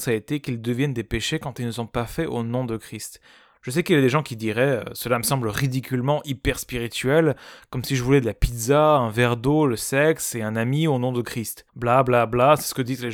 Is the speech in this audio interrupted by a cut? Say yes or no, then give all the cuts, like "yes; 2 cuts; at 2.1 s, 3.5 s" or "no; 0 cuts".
yes; 1 cut; at 11.7 s